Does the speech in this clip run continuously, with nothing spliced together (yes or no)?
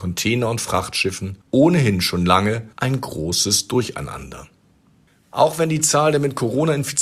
no